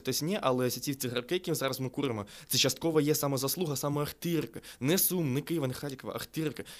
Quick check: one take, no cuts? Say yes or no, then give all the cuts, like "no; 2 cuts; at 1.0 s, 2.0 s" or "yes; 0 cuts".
yes; 0 cuts